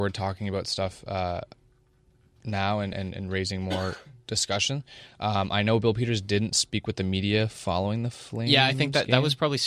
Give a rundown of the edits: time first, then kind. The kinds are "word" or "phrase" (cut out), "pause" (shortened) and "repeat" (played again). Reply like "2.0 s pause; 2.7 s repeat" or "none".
none